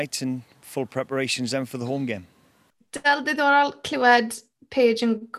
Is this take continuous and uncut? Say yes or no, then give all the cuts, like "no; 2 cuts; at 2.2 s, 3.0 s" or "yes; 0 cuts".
yes; 0 cuts